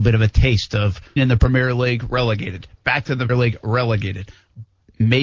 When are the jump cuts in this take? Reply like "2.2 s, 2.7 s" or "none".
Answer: 1.2 s, 3.3 s

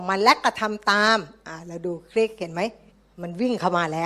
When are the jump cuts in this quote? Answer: 2.9 s

